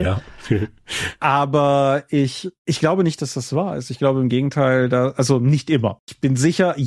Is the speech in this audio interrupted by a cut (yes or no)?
no